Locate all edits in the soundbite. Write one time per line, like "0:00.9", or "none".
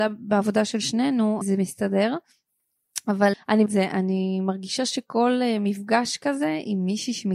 0:01.4
0:03.3
0:03.7